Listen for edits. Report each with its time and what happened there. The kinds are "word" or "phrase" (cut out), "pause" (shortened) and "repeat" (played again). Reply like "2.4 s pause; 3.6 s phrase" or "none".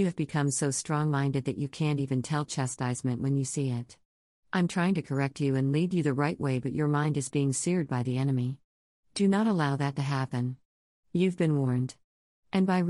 none